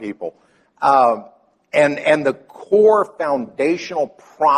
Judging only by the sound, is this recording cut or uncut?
uncut